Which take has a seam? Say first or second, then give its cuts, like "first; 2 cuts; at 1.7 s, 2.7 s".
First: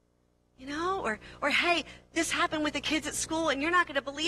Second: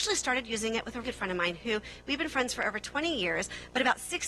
second; 1 cut; at 1.0 s